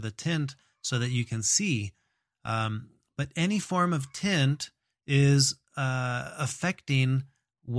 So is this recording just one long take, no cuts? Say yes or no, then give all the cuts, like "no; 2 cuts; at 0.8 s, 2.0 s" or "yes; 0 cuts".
yes; 0 cuts